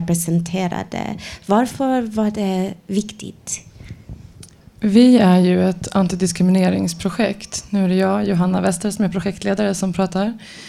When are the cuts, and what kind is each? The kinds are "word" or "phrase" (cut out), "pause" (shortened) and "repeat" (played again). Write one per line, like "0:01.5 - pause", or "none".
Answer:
none